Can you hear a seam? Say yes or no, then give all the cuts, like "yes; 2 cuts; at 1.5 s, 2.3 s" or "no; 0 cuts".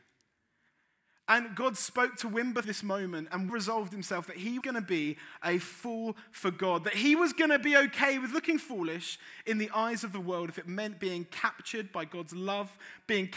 yes; 3 cuts; at 2.6 s, 3.5 s, 4.6 s